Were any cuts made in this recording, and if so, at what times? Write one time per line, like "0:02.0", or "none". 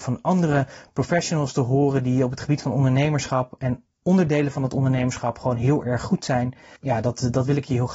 none